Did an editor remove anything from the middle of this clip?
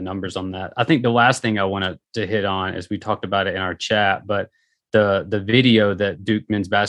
no; 0 cuts

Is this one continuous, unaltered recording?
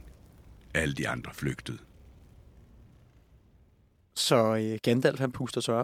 yes; 0 cuts

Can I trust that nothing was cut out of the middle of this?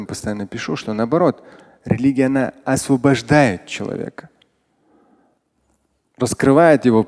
yes; 0 cuts

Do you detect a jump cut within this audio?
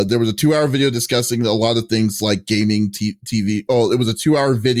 no; 0 cuts

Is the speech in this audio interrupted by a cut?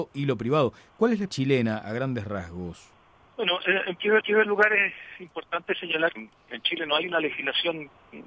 yes; 4 cuts; at 1.3 s, 3.3 s, 4.2 s, 6.2 s

